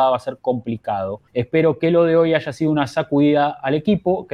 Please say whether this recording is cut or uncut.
cut